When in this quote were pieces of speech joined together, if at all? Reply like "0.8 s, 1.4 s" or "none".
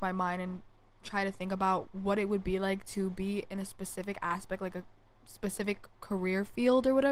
none